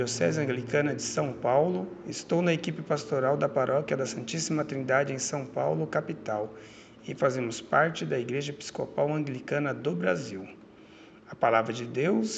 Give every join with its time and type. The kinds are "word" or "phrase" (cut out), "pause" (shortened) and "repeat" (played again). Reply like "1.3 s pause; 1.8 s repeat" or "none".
none